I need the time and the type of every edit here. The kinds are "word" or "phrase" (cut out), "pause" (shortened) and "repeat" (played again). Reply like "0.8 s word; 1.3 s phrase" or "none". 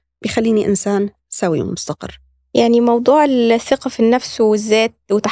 none